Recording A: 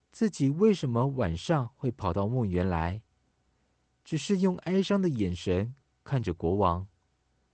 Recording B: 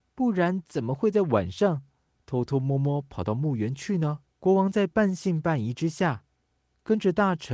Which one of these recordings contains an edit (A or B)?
B